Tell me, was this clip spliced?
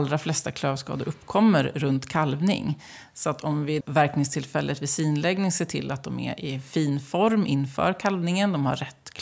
yes; 1 cut; at 3.8 s

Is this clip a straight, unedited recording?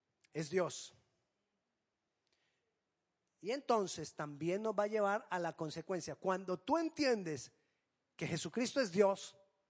yes; 0 cuts

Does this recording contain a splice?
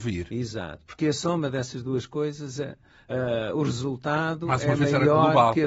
no; 0 cuts

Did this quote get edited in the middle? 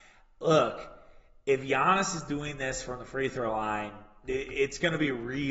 no; 0 cuts

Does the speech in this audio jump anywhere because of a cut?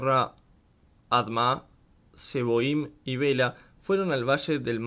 no; 0 cuts

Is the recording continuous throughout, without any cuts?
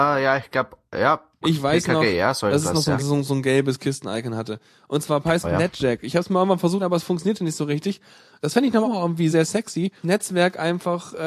no; 7 cuts; at 1.4 s, 3.0 s, 5.4 s, 6.8 s, 8.8 s, 9.3 s, 10.0 s

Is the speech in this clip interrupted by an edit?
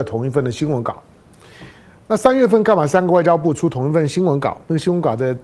no; 0 cuts

